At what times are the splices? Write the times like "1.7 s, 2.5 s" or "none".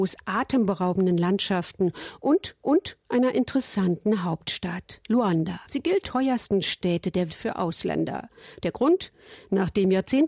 2.6 s, 5.6 s, 6.0 s, 7.3 s